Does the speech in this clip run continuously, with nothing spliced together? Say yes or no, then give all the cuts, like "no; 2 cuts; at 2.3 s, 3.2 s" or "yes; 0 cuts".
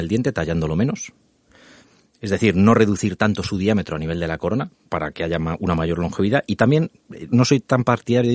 no; 1 cut; at 7.3 s